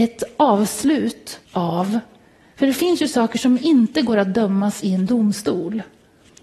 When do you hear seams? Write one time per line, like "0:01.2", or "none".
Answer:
0:01.4